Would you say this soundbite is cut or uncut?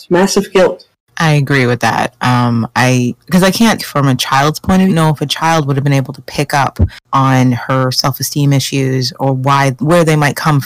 cut